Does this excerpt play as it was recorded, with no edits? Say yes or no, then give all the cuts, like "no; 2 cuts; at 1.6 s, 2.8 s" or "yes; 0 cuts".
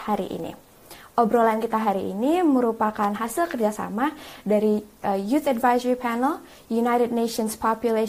yes; 0 cuts